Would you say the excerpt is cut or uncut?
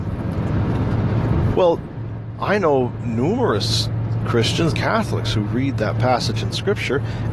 cut